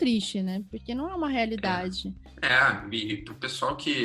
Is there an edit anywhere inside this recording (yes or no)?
no